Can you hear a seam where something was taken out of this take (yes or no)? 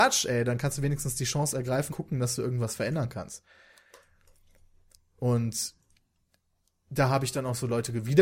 yes